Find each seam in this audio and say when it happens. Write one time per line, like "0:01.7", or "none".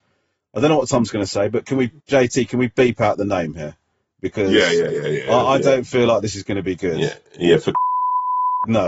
0:02.0